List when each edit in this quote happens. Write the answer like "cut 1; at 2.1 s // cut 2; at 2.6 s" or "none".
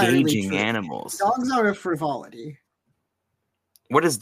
none